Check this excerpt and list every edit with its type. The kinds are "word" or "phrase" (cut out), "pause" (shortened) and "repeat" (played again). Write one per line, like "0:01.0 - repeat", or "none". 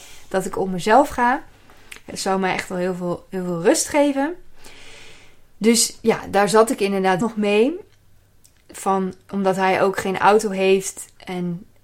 0:07.2 - word